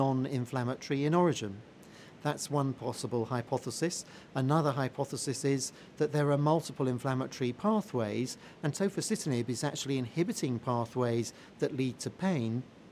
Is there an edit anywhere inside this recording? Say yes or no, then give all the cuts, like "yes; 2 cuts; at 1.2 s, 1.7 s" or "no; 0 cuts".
no; 0 cuts